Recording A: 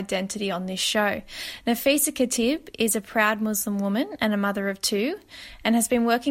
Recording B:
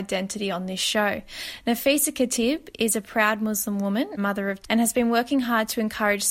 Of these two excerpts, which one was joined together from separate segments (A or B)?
B